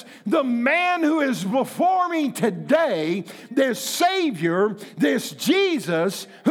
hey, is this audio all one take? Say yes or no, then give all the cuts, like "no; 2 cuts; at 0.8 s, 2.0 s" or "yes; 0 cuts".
yes; 0 cuts